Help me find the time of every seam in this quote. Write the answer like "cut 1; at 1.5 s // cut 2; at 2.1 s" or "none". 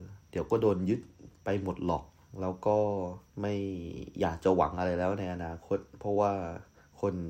cut 1; at 3.3 s

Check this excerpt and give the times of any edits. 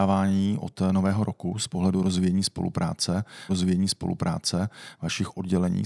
cut 1; at 3.5 s

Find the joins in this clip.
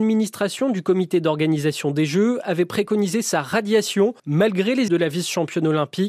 cut 1; at 4.2 s // cut 2; at 4.9 s

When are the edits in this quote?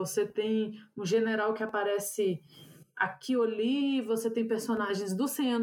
none

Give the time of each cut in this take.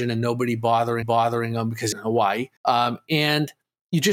cut 1; at 1.0 s // cut 2; at 1.9 s // cut 3; at 2.6 s

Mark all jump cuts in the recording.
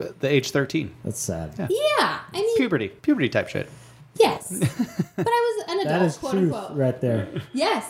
cut 1; at 3.0 s

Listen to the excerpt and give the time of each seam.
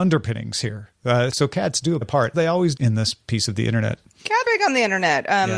cut 1; at 1.3 s // cut 2; at 2.0 s // cut 3; at 2.3 s // cut 4; at 2.8 s // cut 5; at 4.4 s

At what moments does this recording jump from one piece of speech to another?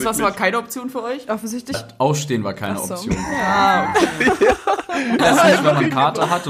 cut 1; at 1.7 s // cut 2; at 5.2 s

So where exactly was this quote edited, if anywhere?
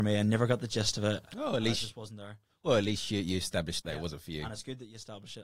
cut 1; at 3.8 s

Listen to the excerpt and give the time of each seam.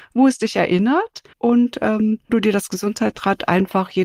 cut 1; at 1.3 s // cut 2; at 2.3 s

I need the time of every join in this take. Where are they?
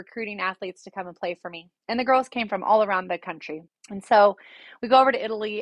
cut 1; at 1.8 s // cut 2; at 3.7 s

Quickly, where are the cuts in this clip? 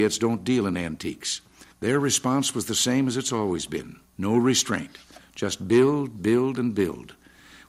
cut 1; at 1.7 s // cut 2; at 4.1 s

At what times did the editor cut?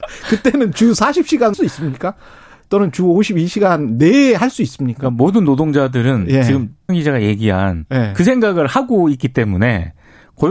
cut 1; at 1.5 s // cut 2; at 6.9 s

